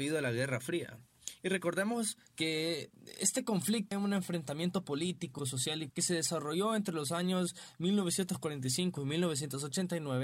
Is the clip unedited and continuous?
no; 3 cuts; at 3.9 s, 5.4 s, 5.9 s

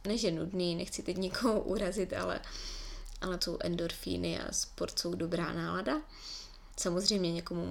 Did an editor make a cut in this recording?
yes; 1 cut; at 3.4 s

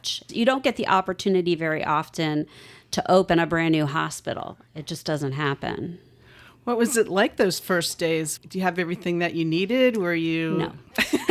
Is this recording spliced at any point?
no; 0 cuts

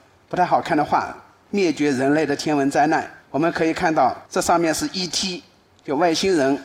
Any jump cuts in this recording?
yes; 2 cuts; at 3.2 s, 4.3 s

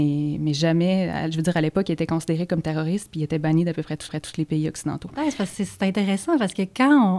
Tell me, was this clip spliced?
yes; 1 cut; at 4.1 s

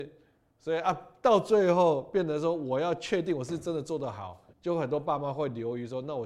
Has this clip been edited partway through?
yes; 1 cut; at 4.5 s

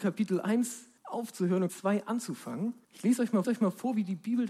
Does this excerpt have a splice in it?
yes; 4 cuts; at 1.0 s, 1.7 s, 2.8 s, 3.4 s

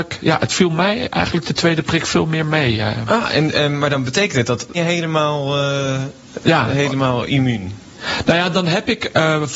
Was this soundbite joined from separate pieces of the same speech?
yes; 2 cuts; at 4.7 s, 7.3 s

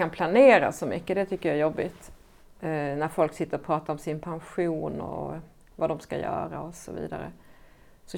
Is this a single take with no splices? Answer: yes; 0 cuts

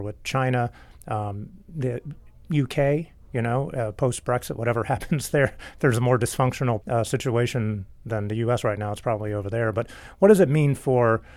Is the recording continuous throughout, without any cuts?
no; 1 cut; at 6.8 s

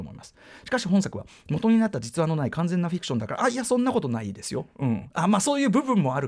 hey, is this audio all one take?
yes; 0 cuts

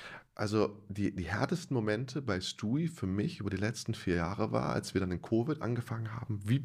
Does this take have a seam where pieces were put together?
no; 0 cuts

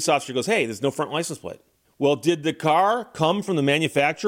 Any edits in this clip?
yes; 1 cut; at 1.8 s

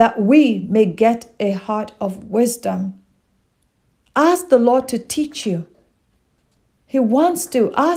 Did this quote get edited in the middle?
no; 0 cuts

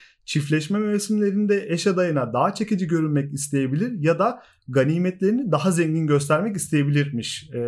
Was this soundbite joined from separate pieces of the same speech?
no; 0 cuts

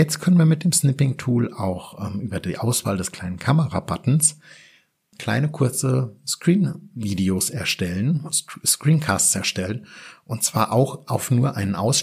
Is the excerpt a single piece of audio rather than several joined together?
yes; 0 cuts

